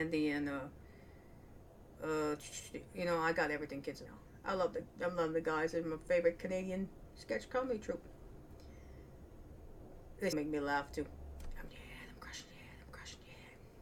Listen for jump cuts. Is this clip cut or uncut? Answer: cut